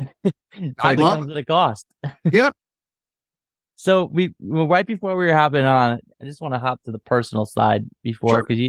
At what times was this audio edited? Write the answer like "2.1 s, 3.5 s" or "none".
1.0 s